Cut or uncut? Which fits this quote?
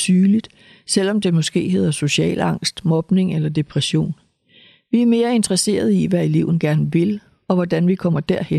uncut